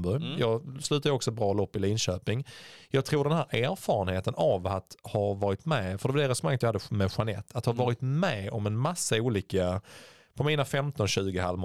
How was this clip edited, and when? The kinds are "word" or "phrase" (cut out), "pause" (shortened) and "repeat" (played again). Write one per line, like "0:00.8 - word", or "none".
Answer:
none